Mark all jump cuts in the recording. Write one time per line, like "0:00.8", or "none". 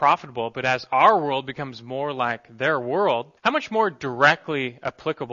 0:03.4